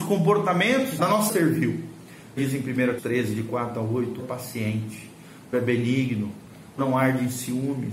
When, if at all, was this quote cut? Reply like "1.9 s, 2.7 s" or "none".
1.0 s, 1.3 s, 2.4 s, 3.0 s, 4.2 s, 5.5 s, 6.8 s